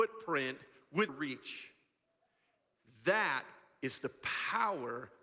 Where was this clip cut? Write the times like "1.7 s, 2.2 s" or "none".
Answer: 1.1 s